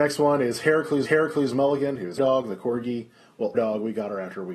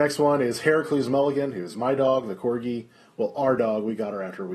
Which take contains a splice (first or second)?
first